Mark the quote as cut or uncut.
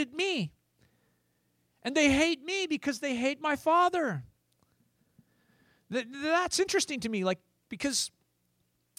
uncut